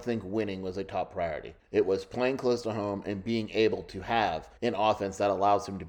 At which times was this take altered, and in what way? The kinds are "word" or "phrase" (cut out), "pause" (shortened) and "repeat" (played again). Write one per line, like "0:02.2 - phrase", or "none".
0:01.6 - pause
0:04.6 - pause

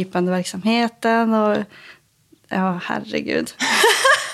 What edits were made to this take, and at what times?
none

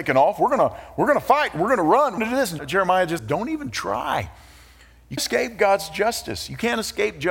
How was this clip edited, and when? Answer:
0:02.2 - word
0:02.6 - word
0:03.2 - word
0:05.2 - word

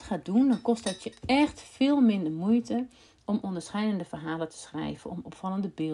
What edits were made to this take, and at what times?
none

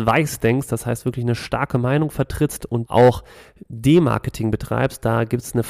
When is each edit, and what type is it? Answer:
0:02.9 - phrase

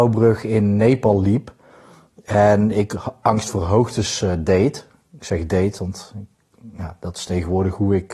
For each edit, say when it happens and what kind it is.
none

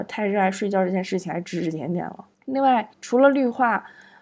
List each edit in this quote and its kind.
0:02.3 - pause
0:02.9 - pause

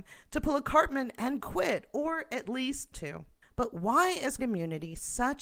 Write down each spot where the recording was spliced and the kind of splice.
0:01.4 - word
0:02.9 - word
0:03.4 - pause
0:04.4 - word

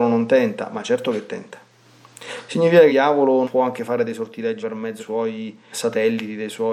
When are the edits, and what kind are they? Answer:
0:02.9 - word
0:03.4 - word
0:04.6 - word
0:05.0 - word
0:05.7 - word

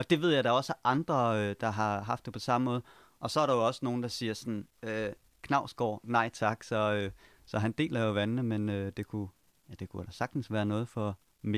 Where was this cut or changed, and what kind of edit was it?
0:09.8 - word

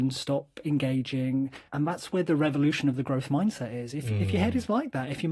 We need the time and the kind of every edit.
0:01.7 - pause

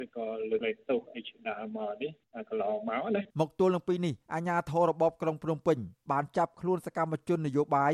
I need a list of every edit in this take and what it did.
0:03.3 - pause

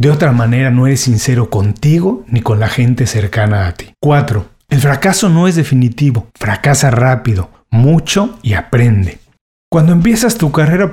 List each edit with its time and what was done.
0:03.9 - pause
0:06.3 - pause

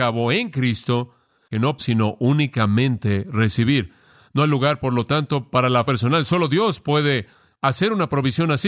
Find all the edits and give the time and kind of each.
0:01.8 - phrase
0:05.9 - word

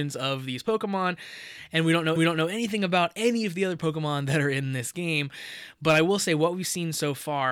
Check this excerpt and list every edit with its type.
0:02.2 - repeat

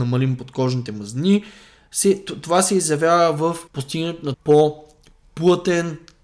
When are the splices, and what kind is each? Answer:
0:03.7 - pause
0:04.3 - word

